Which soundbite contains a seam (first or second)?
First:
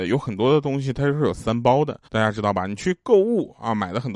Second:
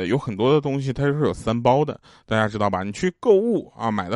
first